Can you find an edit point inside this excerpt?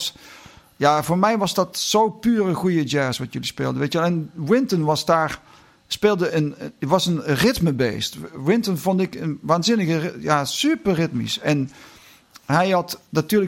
yes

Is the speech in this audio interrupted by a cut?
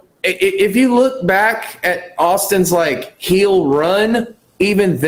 no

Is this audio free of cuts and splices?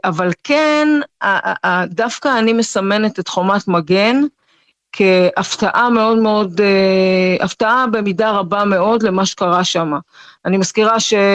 yes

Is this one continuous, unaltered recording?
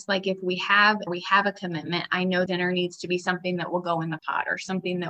no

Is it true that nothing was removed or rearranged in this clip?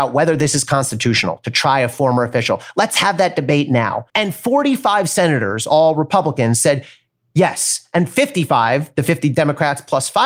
no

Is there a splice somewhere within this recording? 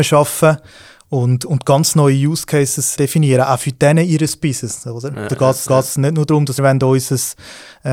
yes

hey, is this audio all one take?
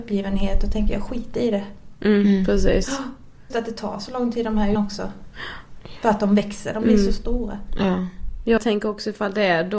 no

